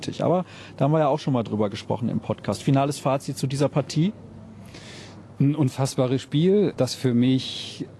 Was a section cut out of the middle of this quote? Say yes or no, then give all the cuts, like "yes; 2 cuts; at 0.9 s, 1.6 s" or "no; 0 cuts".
no; 0 cuts